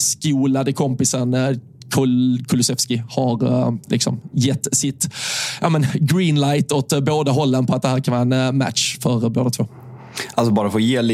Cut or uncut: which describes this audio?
uncut